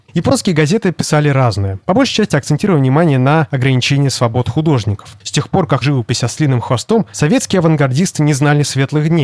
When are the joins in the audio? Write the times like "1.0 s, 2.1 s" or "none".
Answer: 5.8 s